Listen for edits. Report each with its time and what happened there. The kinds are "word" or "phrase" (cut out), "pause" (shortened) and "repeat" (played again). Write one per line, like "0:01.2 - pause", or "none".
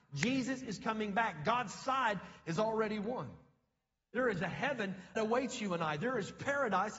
0:05.1 - word